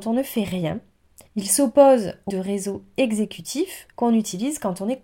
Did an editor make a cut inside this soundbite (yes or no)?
yes